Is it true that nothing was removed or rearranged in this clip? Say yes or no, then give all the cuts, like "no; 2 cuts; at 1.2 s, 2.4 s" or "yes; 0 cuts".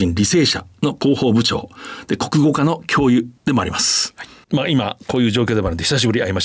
no; 2 cuts; at 3.4 s, 4.4 s